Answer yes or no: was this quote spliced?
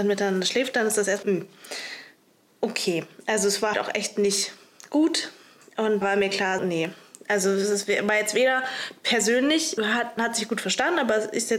yes